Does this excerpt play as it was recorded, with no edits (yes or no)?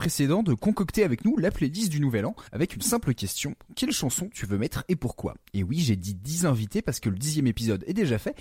no